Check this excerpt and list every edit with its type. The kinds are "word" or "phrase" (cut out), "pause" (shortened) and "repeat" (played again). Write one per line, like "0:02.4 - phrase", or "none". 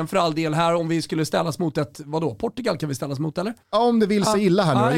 0:03.6 - pause